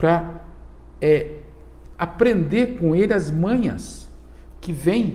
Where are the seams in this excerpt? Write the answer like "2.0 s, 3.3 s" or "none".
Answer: none